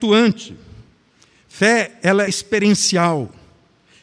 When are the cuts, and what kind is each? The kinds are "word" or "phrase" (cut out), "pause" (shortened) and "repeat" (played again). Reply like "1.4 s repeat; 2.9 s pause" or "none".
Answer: 2.3 s word